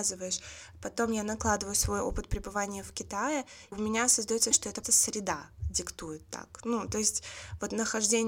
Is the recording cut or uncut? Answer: cut